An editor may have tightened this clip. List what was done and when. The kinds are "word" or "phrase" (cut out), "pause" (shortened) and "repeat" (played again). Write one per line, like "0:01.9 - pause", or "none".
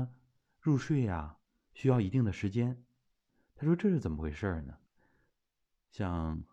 0:01.5 - pause
0:03.3 - pause
0:04.9 - pause